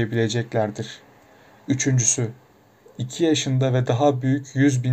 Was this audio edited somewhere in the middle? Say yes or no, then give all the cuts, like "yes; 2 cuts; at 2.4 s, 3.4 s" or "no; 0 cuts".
no; 0 cuts